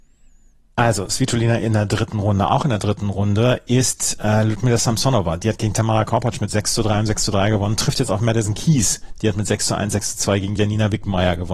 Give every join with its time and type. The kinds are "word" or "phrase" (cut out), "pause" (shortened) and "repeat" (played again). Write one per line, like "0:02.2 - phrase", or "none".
none